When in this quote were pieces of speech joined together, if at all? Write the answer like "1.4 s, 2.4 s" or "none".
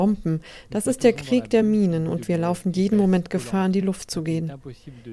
none

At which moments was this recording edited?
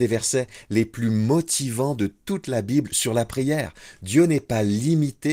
none

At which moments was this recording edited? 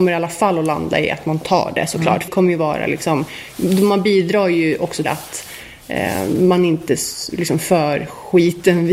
2.3 s, 5.0 s

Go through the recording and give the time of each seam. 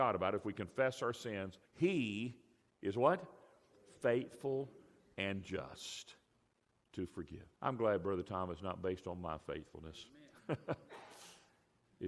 1.7 s, 7.5 s

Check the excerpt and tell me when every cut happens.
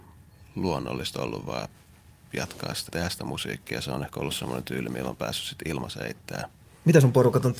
2.9 s

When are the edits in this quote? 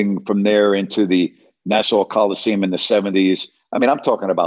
none

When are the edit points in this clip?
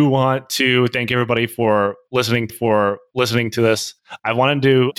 2.5 s

